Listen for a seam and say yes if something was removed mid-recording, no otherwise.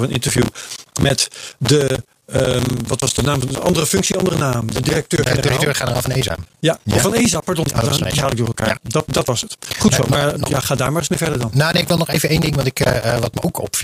no